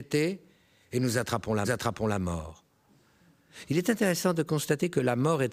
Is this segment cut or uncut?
cut